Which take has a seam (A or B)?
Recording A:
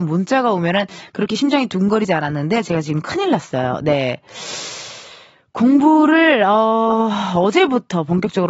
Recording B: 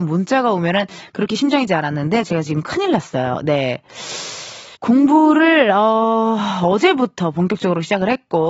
B